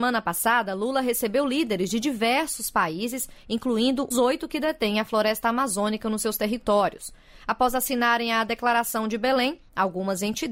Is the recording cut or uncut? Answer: cut